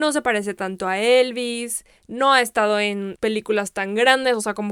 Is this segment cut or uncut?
uncut